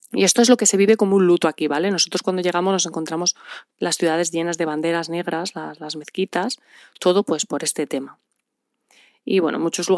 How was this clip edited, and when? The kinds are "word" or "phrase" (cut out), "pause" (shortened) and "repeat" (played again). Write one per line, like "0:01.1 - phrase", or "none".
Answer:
none